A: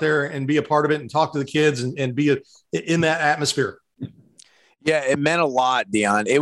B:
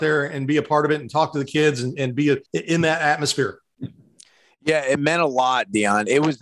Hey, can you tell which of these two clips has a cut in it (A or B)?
B